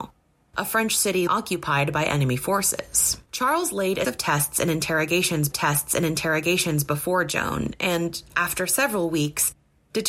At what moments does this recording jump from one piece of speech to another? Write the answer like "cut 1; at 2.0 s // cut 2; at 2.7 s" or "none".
cut 1; at 1.3 s // cut 2; at 3.3 s // cut 3; at 4.0 s // cut 4; at 5.5 s